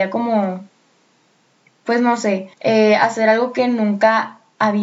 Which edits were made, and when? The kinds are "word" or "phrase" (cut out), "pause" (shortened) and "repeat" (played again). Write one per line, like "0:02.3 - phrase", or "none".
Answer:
0:02.5 - pause